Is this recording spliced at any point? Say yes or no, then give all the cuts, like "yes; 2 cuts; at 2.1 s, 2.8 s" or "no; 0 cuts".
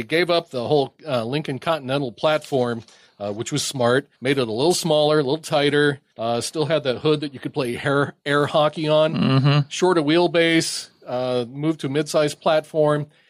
yes; 2 cuts; at 4.1 s, 6.1 s